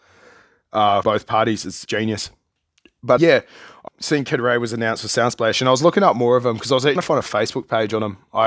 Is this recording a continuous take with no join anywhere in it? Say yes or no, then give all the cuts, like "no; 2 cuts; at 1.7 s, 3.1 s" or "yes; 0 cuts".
no; 5 cuts; at 1.0 s, 1.8 s, 3.2 s, 3.9 s, 7.0 s